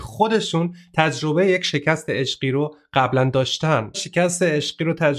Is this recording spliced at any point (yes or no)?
yes